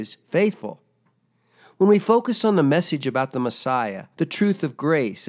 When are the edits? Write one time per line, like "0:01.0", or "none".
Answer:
0:04.1